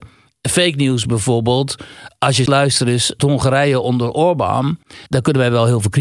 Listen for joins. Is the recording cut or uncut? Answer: cut